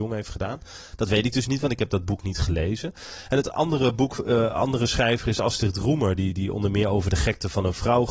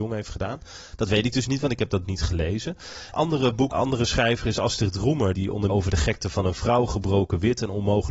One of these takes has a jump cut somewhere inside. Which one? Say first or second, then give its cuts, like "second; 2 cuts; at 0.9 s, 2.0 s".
second; 5 cuts; at 2.0 s, 3.1 s, 3.7 s, 5.3 s, 5.7 s